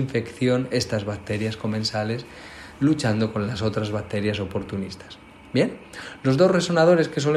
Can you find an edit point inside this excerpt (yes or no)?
no